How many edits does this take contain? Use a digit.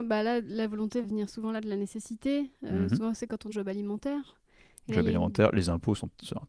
2